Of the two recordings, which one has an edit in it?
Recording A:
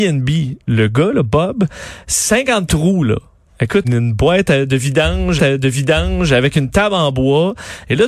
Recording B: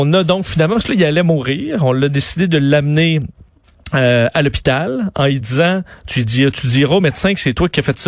A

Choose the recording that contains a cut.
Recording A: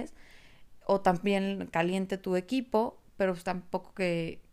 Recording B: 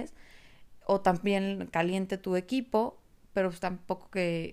A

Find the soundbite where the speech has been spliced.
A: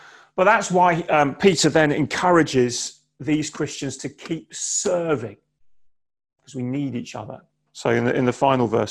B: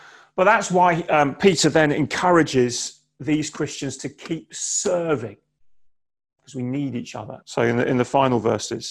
B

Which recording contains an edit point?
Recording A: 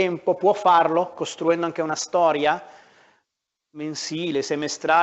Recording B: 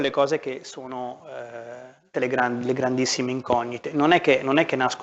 B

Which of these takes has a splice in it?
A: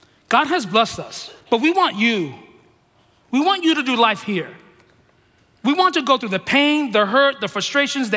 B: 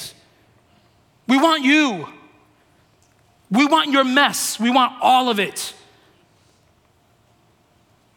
A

